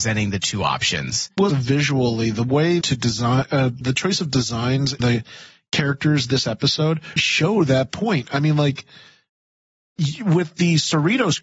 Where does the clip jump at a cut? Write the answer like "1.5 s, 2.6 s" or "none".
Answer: 1.5 s, 2.8 s, 3.8 s, 5.0 s, 7.2 s